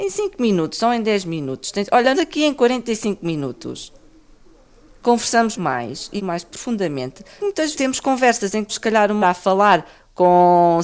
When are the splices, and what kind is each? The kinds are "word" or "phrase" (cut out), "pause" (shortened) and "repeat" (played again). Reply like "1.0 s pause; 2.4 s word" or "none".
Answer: 2.1 s word; 5.5 s word; 6.2 s word; 7.4 s word; 7.7 s word; 8.7 s word; 9.2 s word